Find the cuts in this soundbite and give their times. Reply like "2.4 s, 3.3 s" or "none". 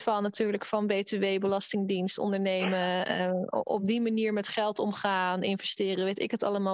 none